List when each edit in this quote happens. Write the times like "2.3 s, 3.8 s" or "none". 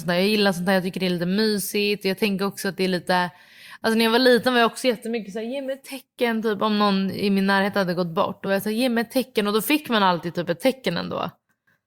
none